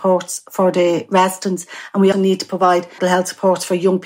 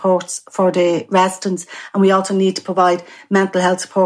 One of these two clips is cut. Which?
first; 2 cuts; at 2.1 s, 3.0 s

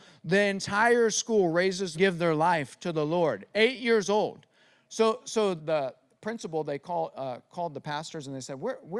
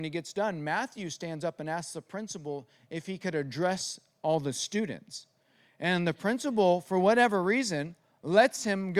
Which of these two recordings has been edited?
first; 2 cuts; at 1.9 s, 5.6 s

